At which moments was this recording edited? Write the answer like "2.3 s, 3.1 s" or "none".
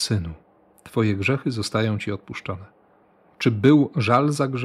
none